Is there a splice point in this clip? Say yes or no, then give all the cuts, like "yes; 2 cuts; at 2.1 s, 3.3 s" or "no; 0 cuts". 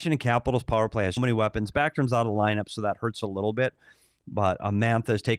yes; 1 cut; at 1.2 s